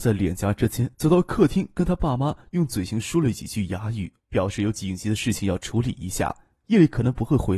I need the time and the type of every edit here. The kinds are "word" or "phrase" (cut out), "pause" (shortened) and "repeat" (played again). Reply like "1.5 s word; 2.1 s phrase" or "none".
0.9 s pause; 4.2 s pause